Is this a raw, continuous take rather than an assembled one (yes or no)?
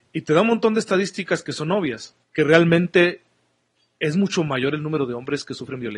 no